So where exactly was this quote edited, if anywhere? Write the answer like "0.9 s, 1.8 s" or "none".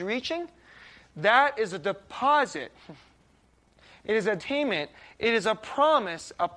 4.4 s